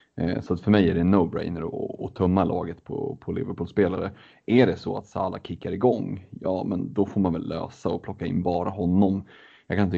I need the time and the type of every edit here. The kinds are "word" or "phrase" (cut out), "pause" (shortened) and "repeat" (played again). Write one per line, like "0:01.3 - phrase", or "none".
none